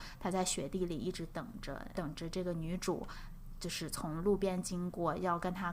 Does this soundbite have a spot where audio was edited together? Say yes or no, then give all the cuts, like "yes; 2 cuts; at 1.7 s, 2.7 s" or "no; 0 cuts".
yes; 1 cut; at 1.9 s